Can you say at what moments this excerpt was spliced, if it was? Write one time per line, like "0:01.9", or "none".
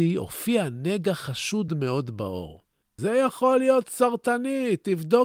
none